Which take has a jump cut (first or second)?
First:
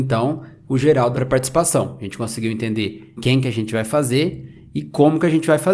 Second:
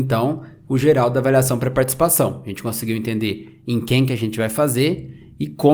first